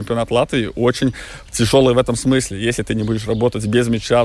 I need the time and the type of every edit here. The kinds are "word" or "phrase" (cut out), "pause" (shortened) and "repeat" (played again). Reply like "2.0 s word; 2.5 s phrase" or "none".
none